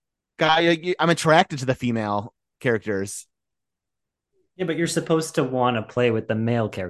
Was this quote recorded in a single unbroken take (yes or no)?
yes